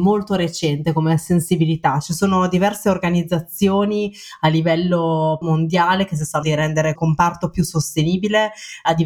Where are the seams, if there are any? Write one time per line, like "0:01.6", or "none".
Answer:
0:05.4
0:06.4
0:07.0